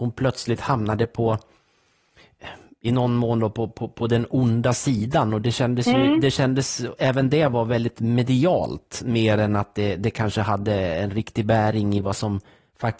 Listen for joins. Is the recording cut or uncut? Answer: uncut